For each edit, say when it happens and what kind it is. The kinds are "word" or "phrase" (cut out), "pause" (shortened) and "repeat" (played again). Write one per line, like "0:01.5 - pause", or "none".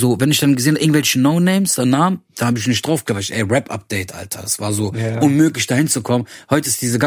none